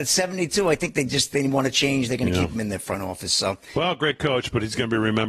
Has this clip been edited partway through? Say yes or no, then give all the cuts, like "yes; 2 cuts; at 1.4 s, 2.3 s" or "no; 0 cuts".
no; 0 cuts